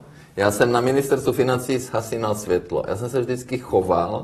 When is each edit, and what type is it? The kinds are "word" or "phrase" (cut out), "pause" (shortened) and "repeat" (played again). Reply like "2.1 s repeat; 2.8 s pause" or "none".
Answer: none

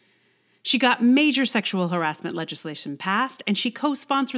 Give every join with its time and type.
none

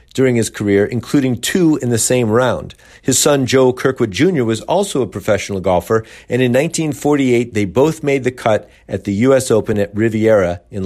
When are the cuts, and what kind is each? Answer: none

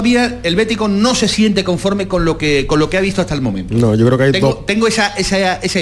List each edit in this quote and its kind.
none

